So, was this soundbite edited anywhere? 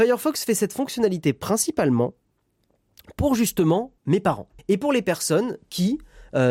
yes; 2 cuts; at 4.0 s, 4.6 s

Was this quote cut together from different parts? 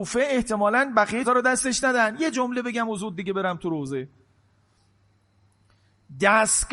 yes; 1 cut; at 1.2 s

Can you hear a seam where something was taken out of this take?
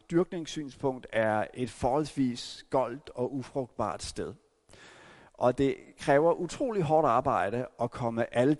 no; 0 cuts

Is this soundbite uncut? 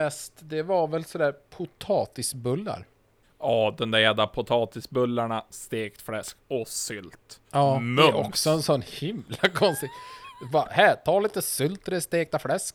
no; 2 cuts; at 3.2 s, 7.4 s

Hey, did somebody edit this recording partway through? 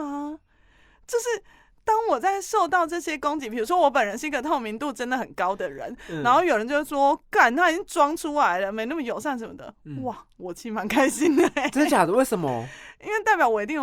no; 0 cuts

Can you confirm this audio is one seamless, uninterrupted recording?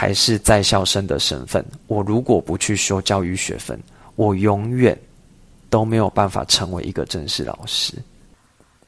yes; 0 cuts

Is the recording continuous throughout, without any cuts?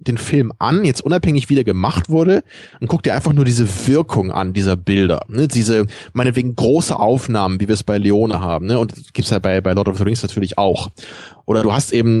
yes; 0 cuts

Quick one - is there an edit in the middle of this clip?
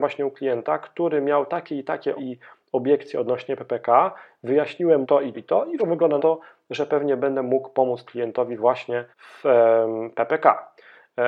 yes; 7 cuts; at 2.2 s, 5.0 s, 5.3 s, 5.8 s, 6.2 s, 8.0 s, 9.1 s

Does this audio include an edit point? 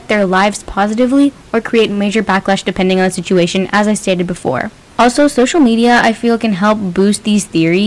no; 0 cuts

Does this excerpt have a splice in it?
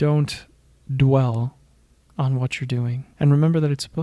no; 0 cuts

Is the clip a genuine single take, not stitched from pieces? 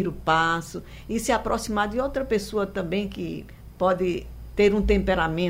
yes; 0 cuts

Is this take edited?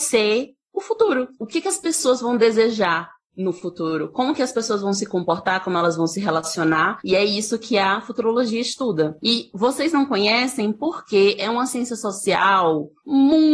no; 0 cuts

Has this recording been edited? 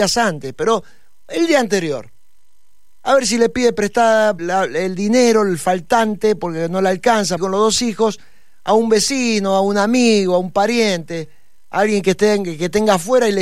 yes; 2 cuts; at 4.4 s, 7.4 s

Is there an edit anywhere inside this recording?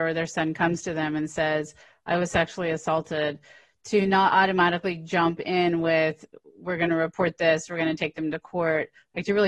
no; 0 cuts

